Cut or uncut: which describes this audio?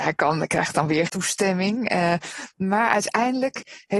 cut